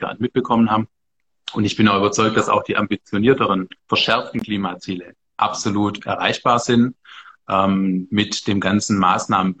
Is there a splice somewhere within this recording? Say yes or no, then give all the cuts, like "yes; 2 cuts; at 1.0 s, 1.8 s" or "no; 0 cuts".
yes; 1 cut; at 3.8 s